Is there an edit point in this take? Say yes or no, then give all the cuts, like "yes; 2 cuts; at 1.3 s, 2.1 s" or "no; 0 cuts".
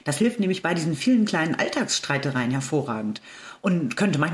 no; 0 cuts